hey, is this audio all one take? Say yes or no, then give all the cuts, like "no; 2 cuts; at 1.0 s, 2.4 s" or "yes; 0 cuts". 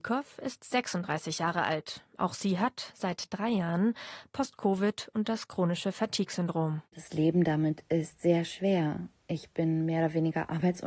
no; 2 cuts; at 6.9 s, 9.2 s